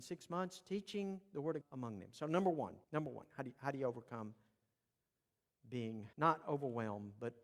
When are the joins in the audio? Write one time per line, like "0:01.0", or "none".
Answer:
0:01.6
0:02.8
0:06.1